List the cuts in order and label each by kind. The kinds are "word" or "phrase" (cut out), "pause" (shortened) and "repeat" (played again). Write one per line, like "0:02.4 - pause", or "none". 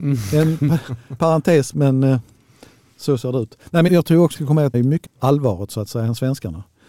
0:01.2 - word
0:01.7 - word
0:03.9 - word
0:04.3 - word
0:04.7 - word
0:05.0 - word